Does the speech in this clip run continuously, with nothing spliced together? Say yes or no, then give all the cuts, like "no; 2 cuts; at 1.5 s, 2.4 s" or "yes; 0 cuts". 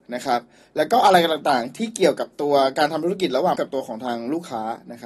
no; 1 cut; at 3.5 s